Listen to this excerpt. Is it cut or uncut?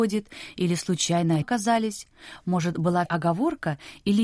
cut